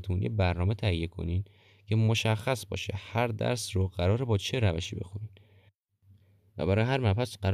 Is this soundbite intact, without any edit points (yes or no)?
yes